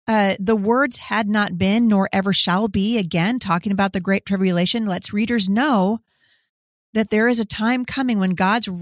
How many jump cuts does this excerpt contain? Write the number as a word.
zero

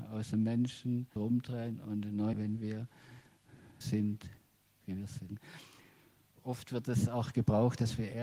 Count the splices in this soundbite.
three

